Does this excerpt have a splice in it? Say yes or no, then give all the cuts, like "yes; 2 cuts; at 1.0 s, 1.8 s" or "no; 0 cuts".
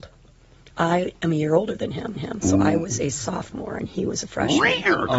yes; 1 cut; at 2.1 s